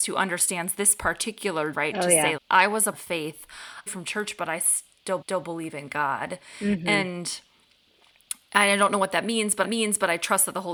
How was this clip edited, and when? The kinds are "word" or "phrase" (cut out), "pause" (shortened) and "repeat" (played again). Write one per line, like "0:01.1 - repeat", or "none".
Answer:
0:01.7 - word
0:02.4 - word
0:02.9 - word
0:03.9 - phrase
0:05.2 - repeat
0:09.6 - repeat